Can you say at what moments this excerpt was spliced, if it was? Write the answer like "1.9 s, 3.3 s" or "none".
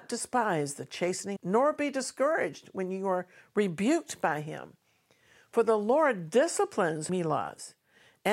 1.4 s, 7.1 s